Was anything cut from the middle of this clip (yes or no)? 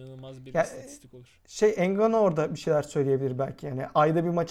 no